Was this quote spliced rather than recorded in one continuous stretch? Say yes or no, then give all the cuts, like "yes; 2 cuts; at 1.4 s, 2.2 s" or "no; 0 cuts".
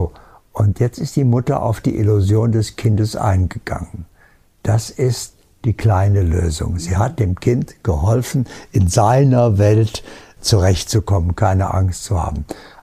yes; 1 cut; at 10.4 s